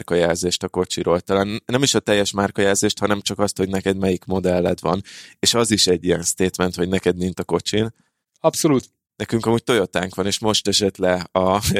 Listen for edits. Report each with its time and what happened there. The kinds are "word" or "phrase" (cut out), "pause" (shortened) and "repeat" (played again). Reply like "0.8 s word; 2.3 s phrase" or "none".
7.3 s word